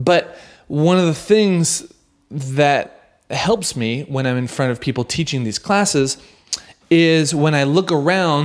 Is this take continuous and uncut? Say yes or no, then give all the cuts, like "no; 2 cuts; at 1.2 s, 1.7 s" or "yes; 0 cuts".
yes; 0 cuts